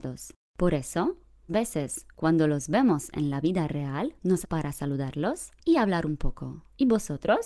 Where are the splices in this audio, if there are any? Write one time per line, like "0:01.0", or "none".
0:01.5
0:04.4